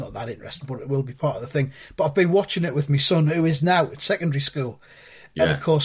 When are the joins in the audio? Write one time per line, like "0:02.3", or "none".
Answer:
none